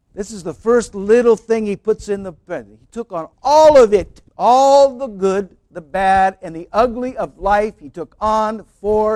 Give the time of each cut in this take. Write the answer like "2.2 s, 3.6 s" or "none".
3.3 s, 4.3 s

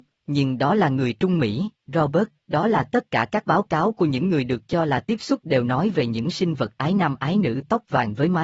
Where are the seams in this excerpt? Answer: 1.8 s

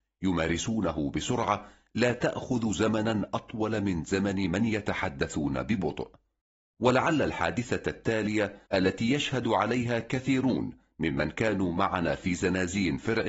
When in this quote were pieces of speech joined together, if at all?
8.7 s

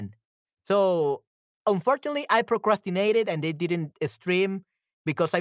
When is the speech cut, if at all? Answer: none

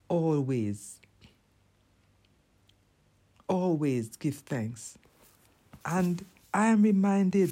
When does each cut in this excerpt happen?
none

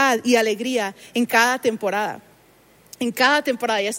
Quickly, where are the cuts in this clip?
none

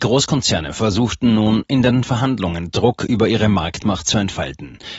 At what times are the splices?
none

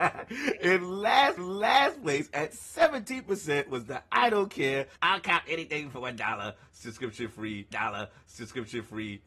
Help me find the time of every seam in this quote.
1.4 s, 5.0 s, 7.7 s

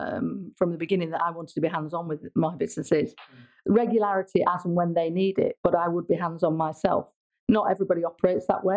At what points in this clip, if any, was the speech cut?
none

